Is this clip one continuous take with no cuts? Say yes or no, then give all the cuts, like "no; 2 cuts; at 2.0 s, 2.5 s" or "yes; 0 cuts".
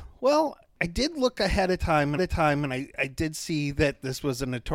no; 1 cut; at 2.2 s